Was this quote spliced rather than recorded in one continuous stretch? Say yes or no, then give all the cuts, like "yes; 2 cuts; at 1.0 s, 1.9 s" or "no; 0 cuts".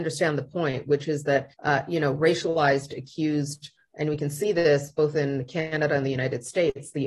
yes; 1 cut; at 1.5 s